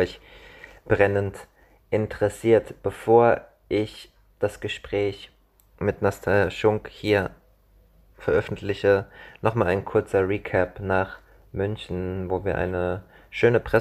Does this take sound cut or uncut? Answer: uncut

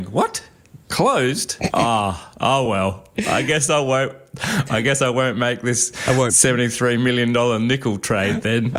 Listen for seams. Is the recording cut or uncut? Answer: uncut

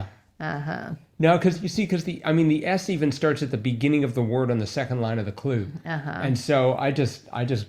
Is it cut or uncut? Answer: uncut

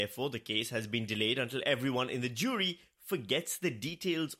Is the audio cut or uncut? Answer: uncut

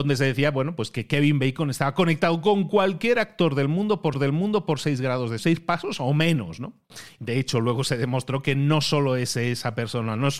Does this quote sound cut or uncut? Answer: cut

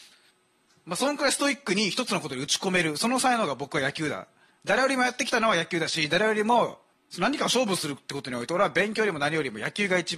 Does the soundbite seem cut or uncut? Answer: cut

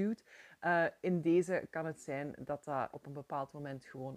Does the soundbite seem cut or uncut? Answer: cut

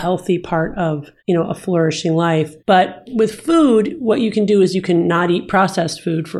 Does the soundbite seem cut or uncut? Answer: cut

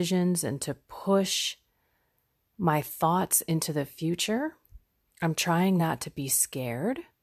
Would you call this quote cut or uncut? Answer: uncut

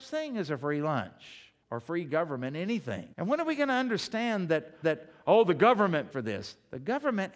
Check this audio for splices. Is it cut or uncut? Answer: cut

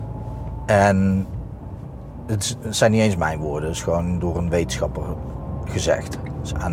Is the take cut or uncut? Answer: uncut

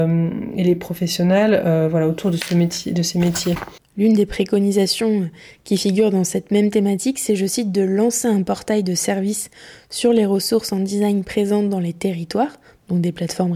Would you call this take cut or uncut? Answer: uncut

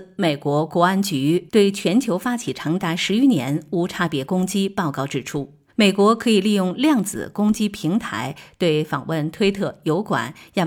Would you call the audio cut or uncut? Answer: cut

